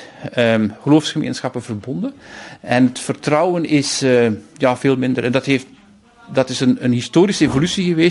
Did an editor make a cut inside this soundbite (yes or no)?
no